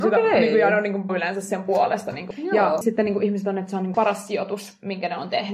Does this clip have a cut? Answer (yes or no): yes